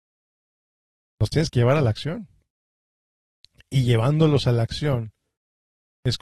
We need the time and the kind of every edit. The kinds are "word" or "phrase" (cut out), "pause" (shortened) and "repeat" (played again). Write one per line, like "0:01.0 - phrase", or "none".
none